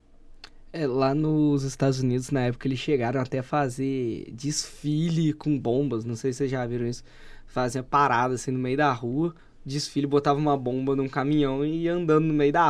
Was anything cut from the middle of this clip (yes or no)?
yes